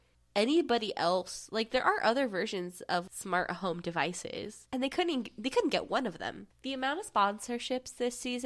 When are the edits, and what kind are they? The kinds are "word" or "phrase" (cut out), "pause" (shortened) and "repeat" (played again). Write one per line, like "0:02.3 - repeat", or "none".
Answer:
0:06.5 - pause